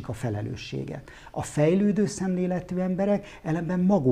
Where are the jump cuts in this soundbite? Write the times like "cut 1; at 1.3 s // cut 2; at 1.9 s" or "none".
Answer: none